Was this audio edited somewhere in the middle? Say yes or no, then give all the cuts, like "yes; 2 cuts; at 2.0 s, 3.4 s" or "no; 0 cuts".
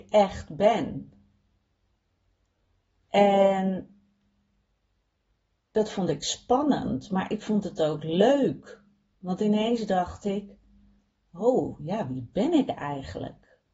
no; 0 cuts